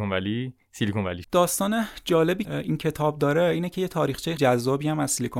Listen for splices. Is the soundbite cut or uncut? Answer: cut